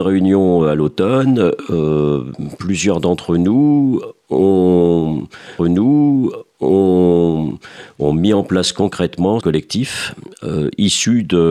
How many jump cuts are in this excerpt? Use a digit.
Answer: 2